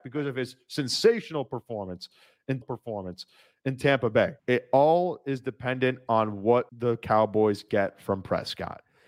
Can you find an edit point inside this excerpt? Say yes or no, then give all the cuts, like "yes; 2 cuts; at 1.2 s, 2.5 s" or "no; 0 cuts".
yes; 3 cuts; at 2.6 s, 4.4 s, 6.7 s